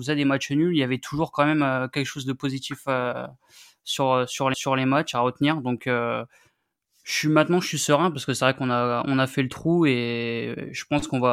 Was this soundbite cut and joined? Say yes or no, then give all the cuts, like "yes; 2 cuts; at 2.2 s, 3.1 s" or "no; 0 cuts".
yes; 1 cut; at 4.5 s